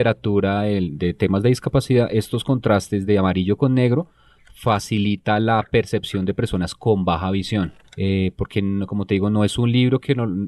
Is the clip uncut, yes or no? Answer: yes